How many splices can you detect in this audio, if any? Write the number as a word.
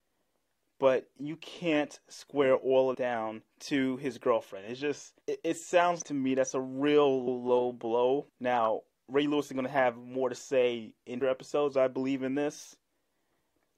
eight